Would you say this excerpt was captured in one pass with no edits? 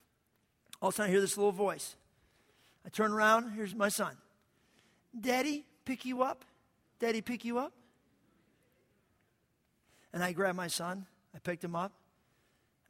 yes; 0 cuts

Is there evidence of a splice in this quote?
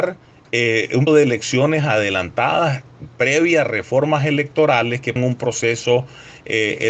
yes; 2 cuts; at 1.1 s, 5.2 s

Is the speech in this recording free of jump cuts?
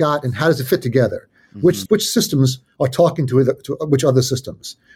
no; 1 cut; at 1.9 s

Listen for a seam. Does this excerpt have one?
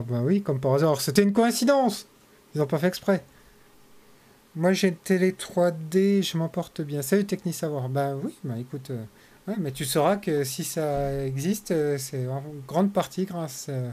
no; 0 cuts

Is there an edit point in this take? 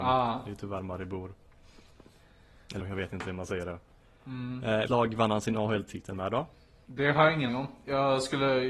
yes; 3 cuts; at 2.8 s, 4.9 s, 7.5 s

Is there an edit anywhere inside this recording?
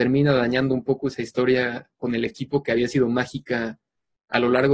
no; 0 cuts

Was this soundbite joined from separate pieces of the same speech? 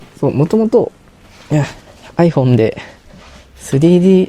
no; 0 cuts

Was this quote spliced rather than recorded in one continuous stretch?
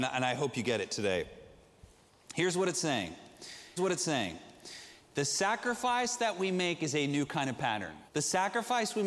yes; 2 cuts; at 3.8 s, 8.1 s

